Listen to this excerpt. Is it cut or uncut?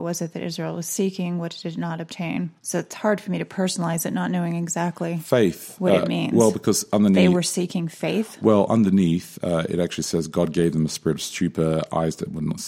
cut